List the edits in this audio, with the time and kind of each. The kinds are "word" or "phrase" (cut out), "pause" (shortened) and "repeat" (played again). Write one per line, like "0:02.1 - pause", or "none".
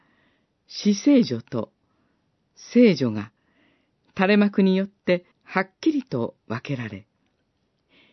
0:05.3 - pause